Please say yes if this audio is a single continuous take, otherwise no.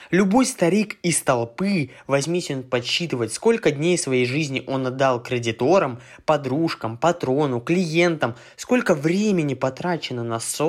yes